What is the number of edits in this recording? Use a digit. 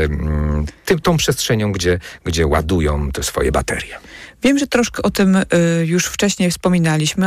0